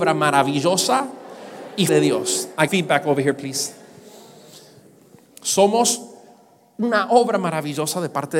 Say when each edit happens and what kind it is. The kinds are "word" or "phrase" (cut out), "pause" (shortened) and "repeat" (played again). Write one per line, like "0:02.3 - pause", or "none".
0:01.9 - word
0:02.7 - word